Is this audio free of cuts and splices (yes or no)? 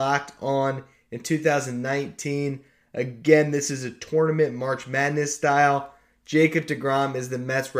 yes